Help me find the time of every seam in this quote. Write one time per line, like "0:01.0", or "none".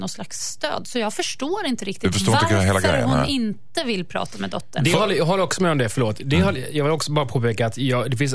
none